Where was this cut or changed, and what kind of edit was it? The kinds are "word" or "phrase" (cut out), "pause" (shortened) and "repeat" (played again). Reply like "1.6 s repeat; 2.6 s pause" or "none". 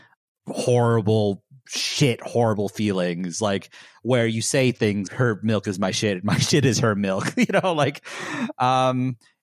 5.1 s word